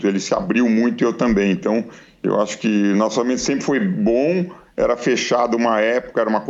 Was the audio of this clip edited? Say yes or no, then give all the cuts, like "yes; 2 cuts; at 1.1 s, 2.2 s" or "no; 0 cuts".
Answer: no; 0 cuts